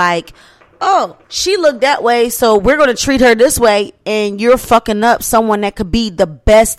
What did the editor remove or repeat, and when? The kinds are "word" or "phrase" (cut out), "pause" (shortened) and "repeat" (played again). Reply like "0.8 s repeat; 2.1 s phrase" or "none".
1.2 s pause